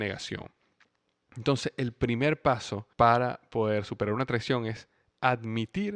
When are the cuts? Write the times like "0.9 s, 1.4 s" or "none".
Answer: 2.9 s